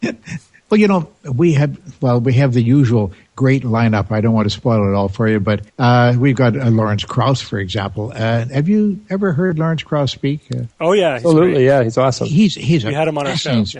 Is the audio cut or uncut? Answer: cut